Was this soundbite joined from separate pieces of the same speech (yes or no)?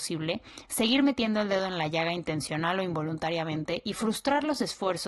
no